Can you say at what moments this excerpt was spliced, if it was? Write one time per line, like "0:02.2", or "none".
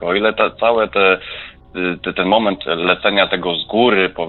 none